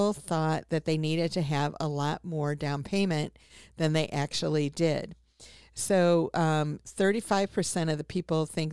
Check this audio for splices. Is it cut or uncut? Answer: uncut